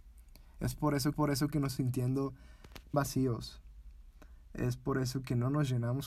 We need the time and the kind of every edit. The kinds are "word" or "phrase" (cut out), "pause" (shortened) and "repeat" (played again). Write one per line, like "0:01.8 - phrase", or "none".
0:01.1 - repeat
0:01.8 - word
0:02.9 - word